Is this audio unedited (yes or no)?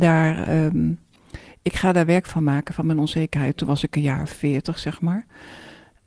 yes